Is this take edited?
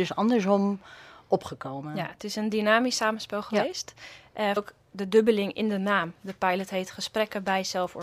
yes; 1 cut; at 4.6 s

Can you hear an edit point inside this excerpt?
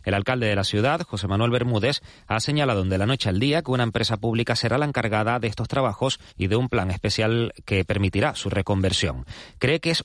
yes; 1 cut; at 6.3 s

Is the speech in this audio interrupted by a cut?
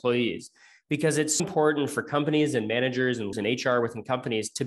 yes; 2 cuts; at 1.4 s, 3.3 s

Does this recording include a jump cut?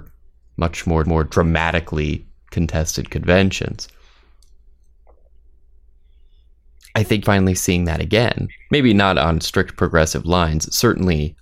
yes; 2 cuts; at 1.0 s, 7.2 s

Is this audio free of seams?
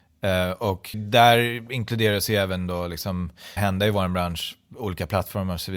no; 2 cuts; at 0.9 s, 3.6 s

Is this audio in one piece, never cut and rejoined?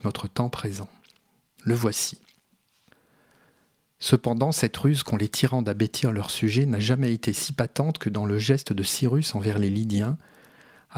yes; 0 cuts

